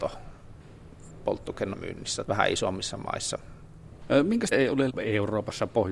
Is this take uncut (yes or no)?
no